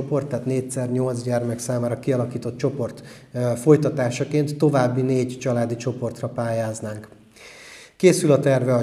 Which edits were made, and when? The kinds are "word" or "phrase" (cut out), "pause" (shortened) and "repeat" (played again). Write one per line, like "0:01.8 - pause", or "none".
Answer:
none